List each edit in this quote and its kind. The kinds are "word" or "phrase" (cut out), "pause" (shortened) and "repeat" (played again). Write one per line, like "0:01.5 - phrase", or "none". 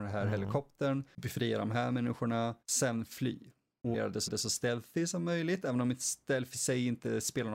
0:02.6 - pause
0:03.9 - word
0:04.3 - repeat